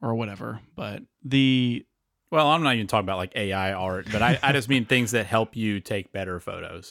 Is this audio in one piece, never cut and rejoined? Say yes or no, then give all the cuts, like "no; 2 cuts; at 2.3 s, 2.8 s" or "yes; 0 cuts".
yes; 0 cuts